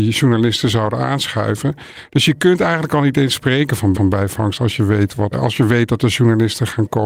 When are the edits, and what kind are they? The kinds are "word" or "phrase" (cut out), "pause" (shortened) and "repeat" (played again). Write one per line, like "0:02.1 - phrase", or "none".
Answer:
0:03.9 - repeat
0:05.3 - word